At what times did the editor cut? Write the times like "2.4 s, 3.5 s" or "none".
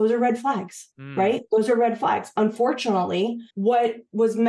0.9 s, 3.5 s